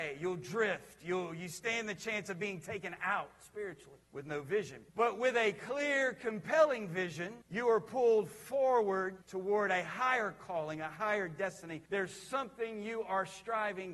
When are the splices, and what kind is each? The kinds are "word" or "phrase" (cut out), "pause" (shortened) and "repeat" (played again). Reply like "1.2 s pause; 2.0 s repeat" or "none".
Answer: 4.0 s pause; 4.9 s pause; 7.4 s pause; 9.2 s pause; 11.9 s pause